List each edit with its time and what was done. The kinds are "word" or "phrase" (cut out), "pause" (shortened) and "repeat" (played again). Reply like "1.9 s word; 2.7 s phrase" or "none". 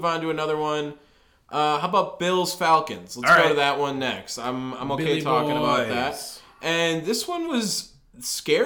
none